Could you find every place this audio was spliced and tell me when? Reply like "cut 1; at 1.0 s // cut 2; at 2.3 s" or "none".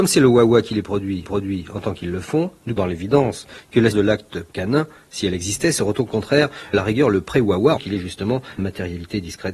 cut 1; at 1.2 s // cut 2; at 2.8 s // cut 3; at 3.9 s // cut 4; at 4.5 s // cut 5; at 6.7 s // cut 6; at 7.8 s // cut 7; at 8.6 s